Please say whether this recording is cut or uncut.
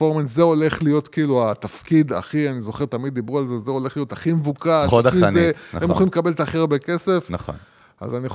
uncut